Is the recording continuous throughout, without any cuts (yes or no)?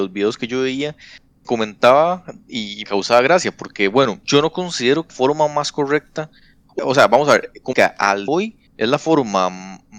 no